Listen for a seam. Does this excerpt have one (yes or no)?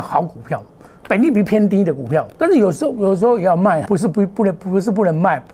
yes